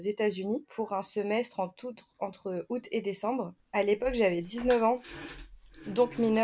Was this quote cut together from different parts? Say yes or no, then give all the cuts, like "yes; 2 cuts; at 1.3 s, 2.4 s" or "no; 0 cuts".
no; 0 cuts